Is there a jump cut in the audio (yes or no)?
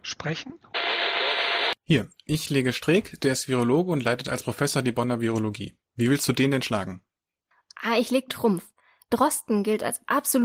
yes